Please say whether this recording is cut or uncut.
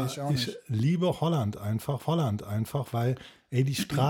cut